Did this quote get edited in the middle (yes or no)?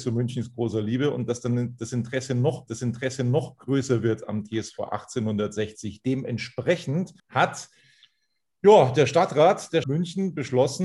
yes